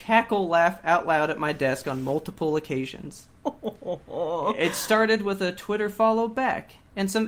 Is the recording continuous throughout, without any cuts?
yes; 0 cuts

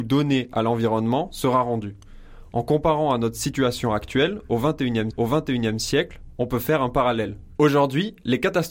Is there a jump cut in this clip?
yes; 1 cut; at 5.1 s

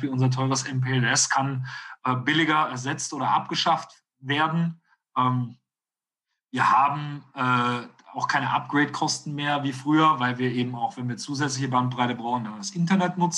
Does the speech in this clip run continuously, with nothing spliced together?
yes; 0 cuts

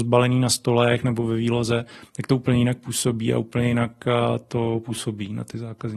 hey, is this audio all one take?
yes; 0 cuts

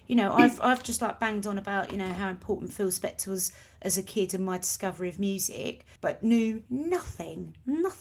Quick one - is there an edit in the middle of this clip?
yes; 2 cuts; at 6.0 s, 6.7 s

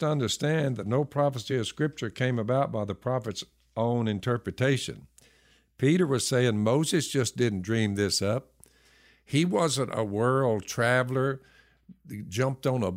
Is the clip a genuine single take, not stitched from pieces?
yes; 0 cuts

